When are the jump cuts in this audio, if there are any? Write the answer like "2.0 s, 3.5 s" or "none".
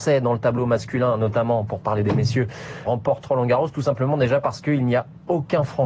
none